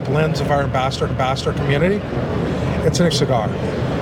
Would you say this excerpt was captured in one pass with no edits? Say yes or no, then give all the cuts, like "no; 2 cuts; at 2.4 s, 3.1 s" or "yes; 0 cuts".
no; 2 cuts; at 1.1 s, 3.1 s